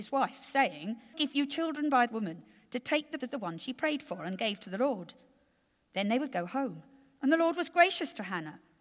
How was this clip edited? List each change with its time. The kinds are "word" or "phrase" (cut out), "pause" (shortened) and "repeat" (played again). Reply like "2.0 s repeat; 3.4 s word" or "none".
1.1 s phrase; 2.1 s word; 3.2 s word